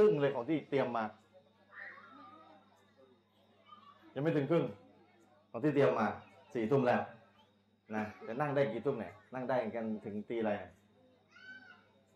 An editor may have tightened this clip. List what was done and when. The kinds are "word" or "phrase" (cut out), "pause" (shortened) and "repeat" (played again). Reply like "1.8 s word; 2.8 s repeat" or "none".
none

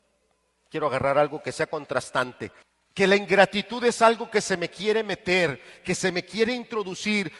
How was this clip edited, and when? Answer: 2.6 s pause

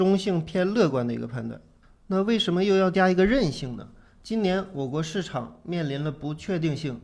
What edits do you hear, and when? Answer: none

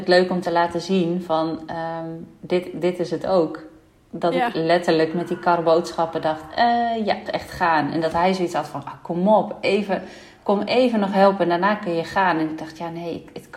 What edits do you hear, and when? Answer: 7.3 s phrase

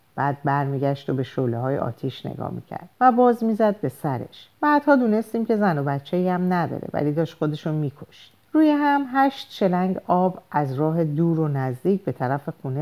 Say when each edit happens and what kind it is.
2.9 s pause; 4.5 s pause; 8.4 s pause

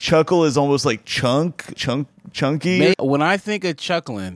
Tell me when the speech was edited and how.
1.7 s word; 2.9 s word

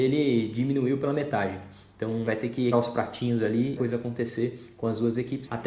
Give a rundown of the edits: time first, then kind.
2.3 s word; 2.7 s word; 3.8 s phrase

